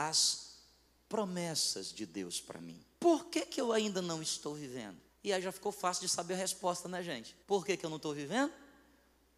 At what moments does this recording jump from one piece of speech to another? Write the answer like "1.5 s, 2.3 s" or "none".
2.9 s, 5.1 s, 7.4 s

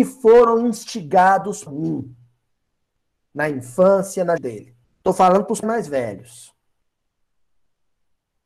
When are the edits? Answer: 1.7 s, 4.4 s, 4.8 s, 5.6 s

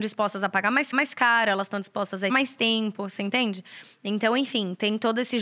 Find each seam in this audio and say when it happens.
0.9 s, 2.3 s

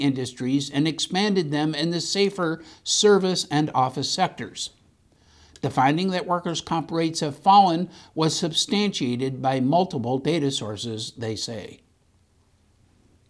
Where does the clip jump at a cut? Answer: none

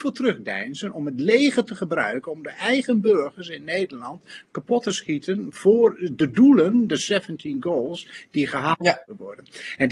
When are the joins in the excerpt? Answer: none

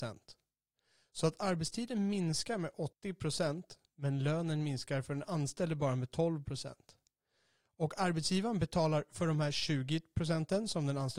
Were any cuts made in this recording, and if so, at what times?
2.9 s

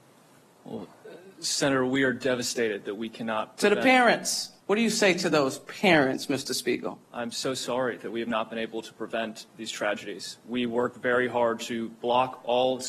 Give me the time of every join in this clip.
1.3 s, 4.6 s, 7.0 s

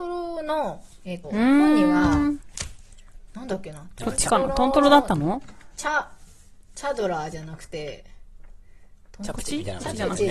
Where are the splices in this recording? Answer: 1.2 s

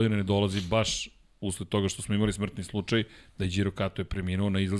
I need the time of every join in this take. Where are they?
none

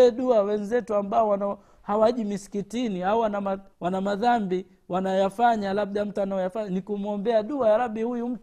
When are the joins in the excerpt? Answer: 3.7 s, 6.2 s

